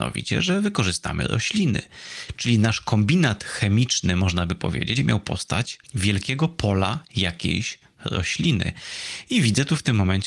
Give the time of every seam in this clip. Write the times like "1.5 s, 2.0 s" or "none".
5.0 s, 5.8 s